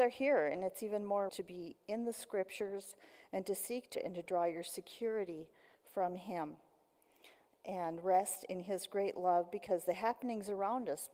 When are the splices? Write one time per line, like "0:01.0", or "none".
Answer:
0:01.3
0:03.9